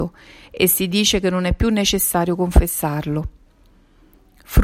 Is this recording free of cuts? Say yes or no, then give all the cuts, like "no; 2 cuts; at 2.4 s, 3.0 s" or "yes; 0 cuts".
yes; 0 cuts